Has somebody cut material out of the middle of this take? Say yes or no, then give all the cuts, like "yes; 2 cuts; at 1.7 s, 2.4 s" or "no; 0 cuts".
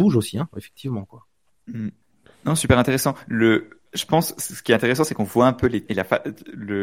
yes; 2 cuts; at 2.0 s, 5.9 s